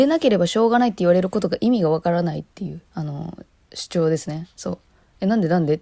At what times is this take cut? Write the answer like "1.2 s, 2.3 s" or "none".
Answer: 2.9 s